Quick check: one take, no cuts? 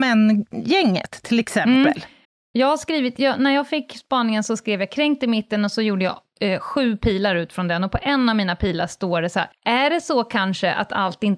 no; 2 cuts; at 2.2 s, 9.5 s

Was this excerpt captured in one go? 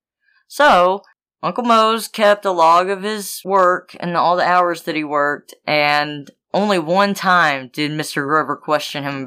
yes; 0 cuts

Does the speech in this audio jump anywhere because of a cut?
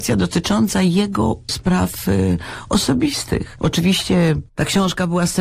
no; 0 cuts

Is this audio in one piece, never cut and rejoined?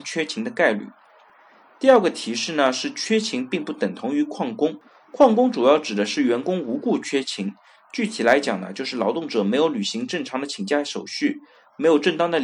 yes; 0 cuts

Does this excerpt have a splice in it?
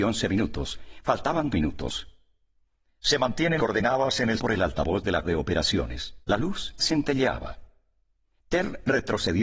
yes; 6 cuts; at 1.5 s, 3.6 s, 4.4 s, 5.2 s, 6.2 s, 6.8 s

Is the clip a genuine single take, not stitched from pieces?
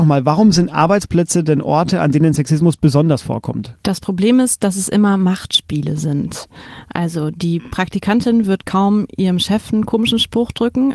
no; 1 cut; at 3.8 s

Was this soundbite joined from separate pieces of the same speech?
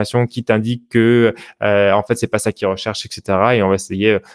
no; 0 cuts

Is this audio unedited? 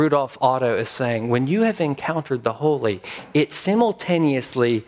yes; 0 cuts

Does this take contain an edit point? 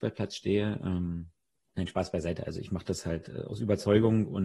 no; 0 cuts

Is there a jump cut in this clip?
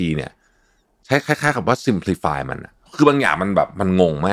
no; 0 cuts

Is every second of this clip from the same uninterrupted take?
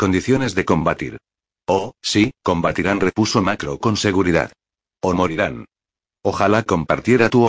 yes; 0 cuts

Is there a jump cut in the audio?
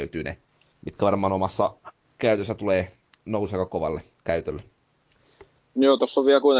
no; 0 cuts

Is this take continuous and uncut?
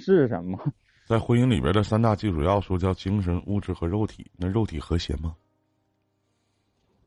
yes; 0 cuts

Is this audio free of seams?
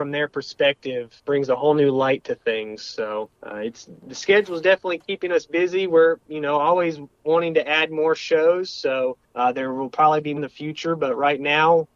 no; 4 cuts; at 1.2 s, 3.3 s, 9.2 s, 10.4 s

